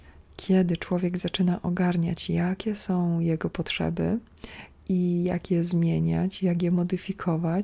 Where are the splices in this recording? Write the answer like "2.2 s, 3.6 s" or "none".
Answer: none